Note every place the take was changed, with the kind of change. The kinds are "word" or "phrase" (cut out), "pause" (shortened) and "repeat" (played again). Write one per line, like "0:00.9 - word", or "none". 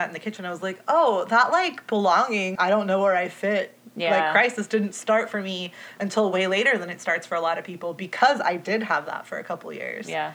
0:02.6 - word